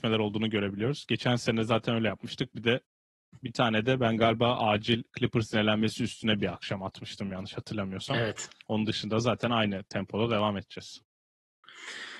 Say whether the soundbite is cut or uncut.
uncut